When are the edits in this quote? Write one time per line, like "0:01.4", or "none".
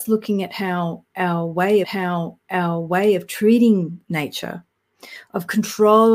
0:01.8
0:04.0

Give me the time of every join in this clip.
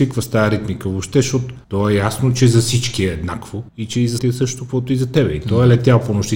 0:01.6
0:03.7
0:04.2

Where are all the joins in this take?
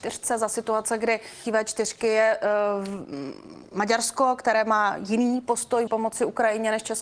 0:01.4
0:05.9

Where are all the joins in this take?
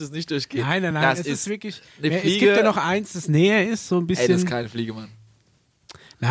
none

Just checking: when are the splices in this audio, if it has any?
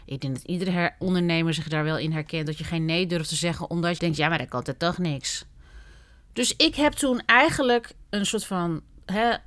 0:01.0
0:04.0

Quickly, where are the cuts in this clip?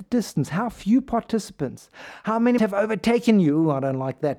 0:02.6

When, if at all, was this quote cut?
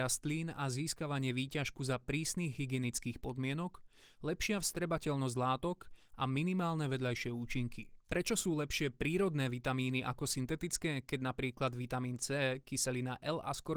none

